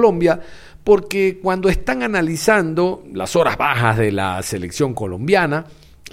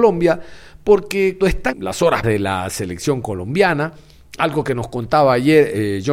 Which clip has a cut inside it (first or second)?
second